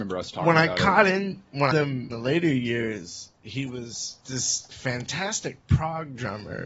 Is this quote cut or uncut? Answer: cut